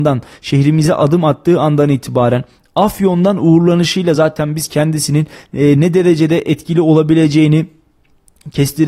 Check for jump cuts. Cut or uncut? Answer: uncut